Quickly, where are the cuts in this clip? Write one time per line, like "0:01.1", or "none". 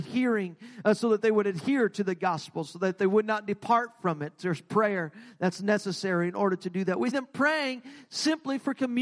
0:07.1